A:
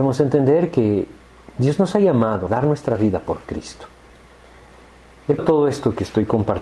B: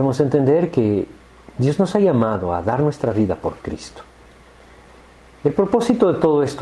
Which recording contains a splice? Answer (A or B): A